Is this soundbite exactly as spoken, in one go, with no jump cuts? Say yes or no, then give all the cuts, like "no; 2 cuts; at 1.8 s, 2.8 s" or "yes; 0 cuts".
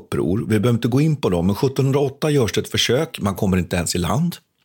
yes; 0 cuts